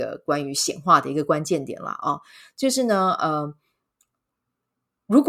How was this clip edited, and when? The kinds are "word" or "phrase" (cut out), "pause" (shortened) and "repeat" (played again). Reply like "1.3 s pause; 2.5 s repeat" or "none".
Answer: none